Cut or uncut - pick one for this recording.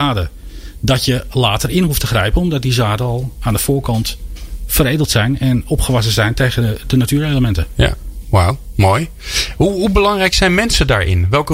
uncut